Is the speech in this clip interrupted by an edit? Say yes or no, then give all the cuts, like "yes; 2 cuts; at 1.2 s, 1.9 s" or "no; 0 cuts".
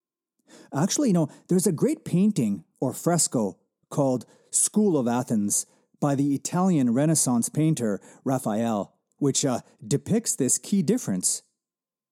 no; 0 cuts